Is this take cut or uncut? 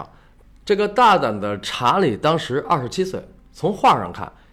uncut